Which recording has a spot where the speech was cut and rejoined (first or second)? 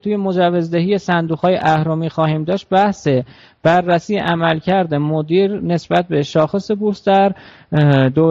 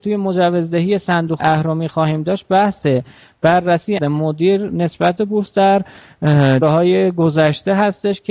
second